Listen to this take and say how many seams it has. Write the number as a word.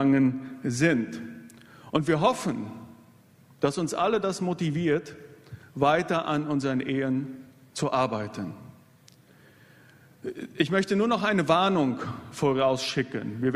zero